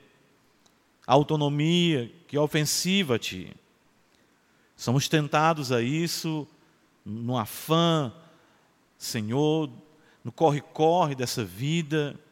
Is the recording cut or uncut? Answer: uncut